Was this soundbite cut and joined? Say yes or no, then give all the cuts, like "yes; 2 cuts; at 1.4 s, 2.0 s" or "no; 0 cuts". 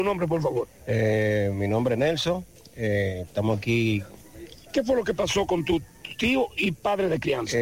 no; 0 cuts